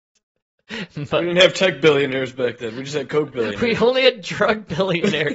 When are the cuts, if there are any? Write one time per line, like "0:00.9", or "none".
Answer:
none

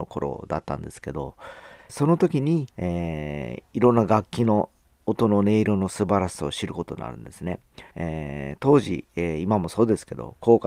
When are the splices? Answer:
0:01.9
0:02.7
0:03.7
0:07.9

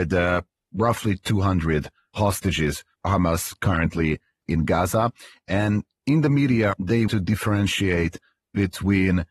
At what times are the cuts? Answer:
0:02.9
0:04.4
0:07.1

